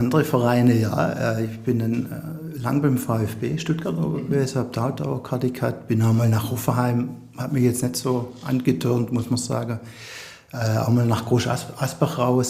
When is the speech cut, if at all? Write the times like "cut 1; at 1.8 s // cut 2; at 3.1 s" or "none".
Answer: none

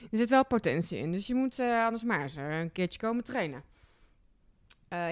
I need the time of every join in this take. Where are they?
none

